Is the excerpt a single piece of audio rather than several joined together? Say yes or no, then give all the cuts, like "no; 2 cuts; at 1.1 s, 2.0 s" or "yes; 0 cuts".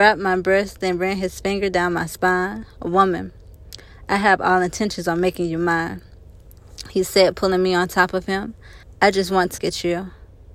no; 2 cuts; at 8.8 s, 9.6 s